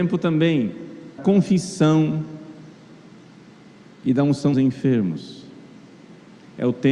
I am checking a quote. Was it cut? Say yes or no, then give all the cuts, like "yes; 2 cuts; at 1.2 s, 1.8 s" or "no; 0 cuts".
yes; 2 cuts; at 1.2 s, 4.5 s